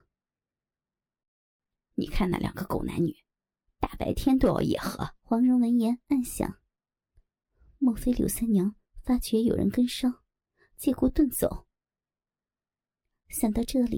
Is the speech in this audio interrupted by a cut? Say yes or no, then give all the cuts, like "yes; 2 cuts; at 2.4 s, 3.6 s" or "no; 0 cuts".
yes; 1 cut; at 5.2 s